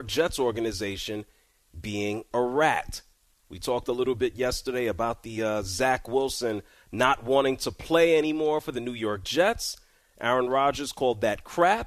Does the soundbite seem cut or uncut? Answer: uncut